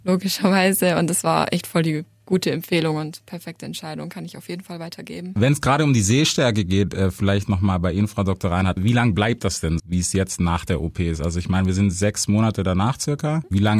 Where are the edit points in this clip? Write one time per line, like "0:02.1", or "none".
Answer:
0:09.8